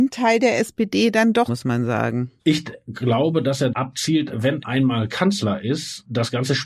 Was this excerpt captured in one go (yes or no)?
no